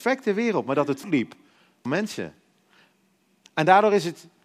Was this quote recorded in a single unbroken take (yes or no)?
no